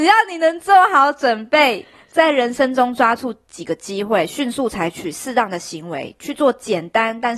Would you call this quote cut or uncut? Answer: uncut